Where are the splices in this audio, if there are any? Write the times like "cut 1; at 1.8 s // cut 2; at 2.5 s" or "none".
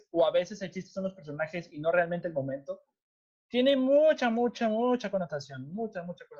none